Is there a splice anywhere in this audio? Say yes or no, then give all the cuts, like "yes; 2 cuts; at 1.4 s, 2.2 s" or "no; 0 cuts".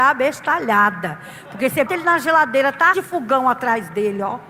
yes; 2 cuts; at 1.9 s, 2.9 s